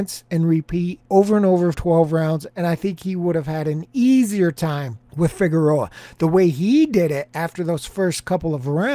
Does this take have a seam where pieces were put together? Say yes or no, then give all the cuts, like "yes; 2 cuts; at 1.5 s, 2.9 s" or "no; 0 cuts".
yes; 3 cuts; at 1.0 s, 1.7 s, 5.1 s